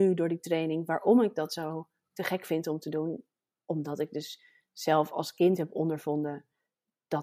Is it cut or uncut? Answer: uncut